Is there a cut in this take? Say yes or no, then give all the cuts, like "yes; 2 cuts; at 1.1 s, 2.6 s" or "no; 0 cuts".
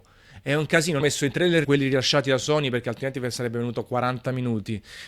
yes; 2 cuts; at 1.0 s, 1.6 s